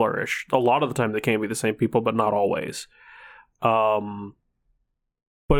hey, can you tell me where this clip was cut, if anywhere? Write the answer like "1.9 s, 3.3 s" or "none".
none